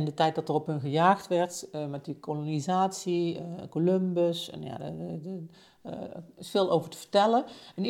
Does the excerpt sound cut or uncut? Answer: uncut